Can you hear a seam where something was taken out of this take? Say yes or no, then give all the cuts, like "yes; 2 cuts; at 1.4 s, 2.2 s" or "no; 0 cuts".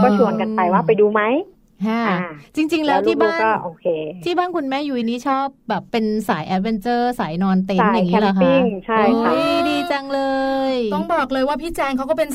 yes; 1 cut; at 5.9 s